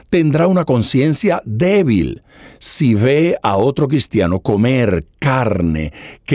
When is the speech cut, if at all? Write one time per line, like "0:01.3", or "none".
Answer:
none